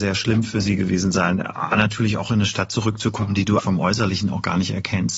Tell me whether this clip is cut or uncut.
cut